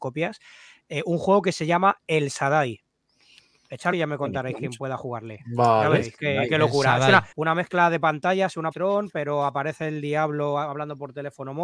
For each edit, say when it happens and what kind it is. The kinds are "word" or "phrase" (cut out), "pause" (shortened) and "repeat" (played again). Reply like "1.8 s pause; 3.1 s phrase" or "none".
3.9 s phrase; 7.3 s pause; 8.7 s word